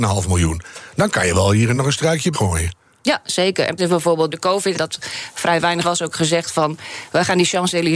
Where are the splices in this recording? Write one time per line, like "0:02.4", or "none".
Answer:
0:01.7
0:02.3
0:03.8
0:04.3
0:04.7
0:05.8